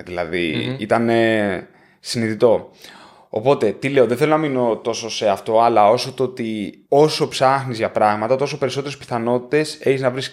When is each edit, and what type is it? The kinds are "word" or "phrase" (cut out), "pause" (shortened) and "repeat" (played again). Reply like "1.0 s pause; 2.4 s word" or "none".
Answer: 6.8 s pause